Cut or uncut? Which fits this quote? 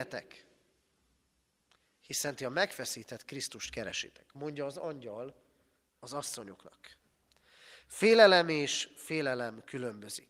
uncut